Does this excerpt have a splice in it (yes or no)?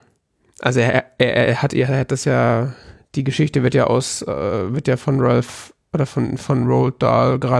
no